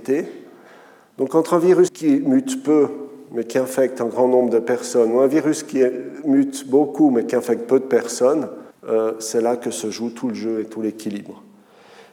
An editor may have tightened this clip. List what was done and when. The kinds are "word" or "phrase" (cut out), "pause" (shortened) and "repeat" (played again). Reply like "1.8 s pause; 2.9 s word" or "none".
1.9 s word; 8.7 s pause